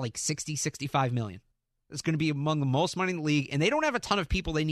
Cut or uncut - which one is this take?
cut